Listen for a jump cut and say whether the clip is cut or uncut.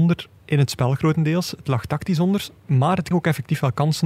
cut